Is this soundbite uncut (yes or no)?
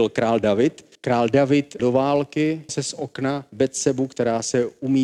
no